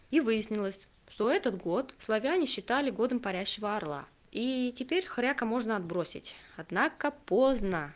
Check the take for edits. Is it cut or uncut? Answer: uncut